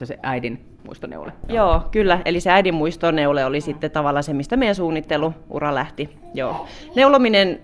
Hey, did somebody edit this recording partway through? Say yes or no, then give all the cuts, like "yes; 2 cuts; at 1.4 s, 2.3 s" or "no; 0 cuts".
no; 0 cuts